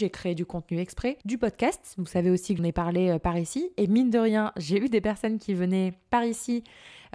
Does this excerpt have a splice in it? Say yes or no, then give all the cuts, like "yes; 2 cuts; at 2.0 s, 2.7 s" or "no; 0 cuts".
yes; 2 cuts; at 1.2 s, 2.6 s